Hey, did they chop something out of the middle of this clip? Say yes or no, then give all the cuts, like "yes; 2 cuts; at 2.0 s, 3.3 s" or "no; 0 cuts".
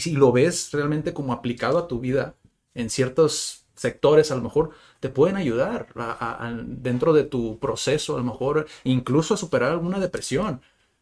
no; 0 cuts